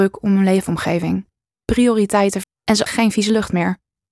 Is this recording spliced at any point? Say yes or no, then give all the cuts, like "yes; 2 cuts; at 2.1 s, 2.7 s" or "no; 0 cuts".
yes; 2 cuts; at 2.4 s, 2.9 s